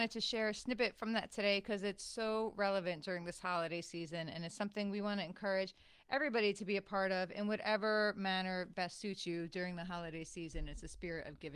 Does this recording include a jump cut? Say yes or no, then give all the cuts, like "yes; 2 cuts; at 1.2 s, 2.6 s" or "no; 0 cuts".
no; 0 cuts